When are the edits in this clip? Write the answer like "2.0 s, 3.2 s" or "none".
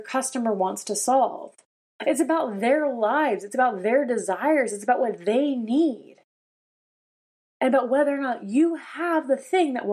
none